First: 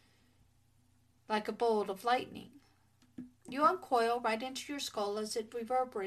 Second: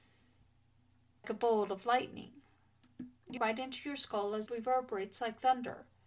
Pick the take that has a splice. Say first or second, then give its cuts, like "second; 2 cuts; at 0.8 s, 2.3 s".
second; 3 cuts; at 1.2 s, 3.4 s, 4.5 s